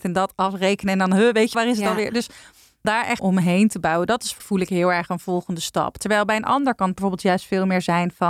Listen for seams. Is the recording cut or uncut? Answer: cut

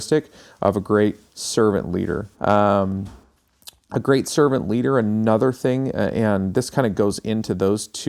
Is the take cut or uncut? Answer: cut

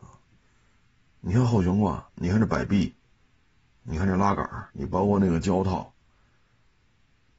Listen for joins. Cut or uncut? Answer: cut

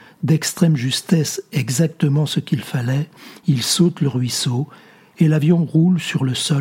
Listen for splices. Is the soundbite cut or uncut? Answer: uncut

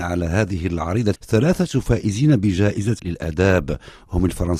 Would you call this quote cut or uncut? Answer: cut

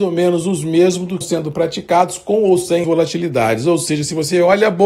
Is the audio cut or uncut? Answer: cut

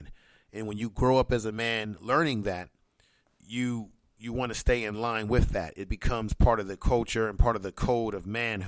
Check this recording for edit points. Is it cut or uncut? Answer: uncut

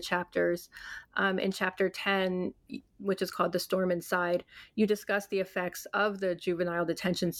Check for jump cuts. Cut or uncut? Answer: uncut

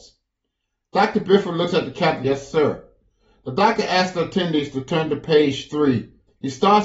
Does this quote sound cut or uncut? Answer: uncut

